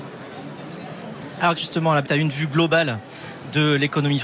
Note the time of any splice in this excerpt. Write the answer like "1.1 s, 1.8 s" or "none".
1.5 s, 2.0 s